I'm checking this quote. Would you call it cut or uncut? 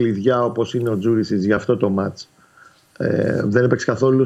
uncut